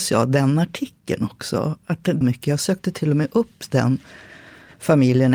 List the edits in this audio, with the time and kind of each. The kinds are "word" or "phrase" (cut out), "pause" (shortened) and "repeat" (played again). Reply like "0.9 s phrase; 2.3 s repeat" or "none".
2.2 s phrase